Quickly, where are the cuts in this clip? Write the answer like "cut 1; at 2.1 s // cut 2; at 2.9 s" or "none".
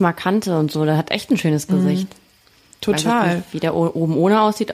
none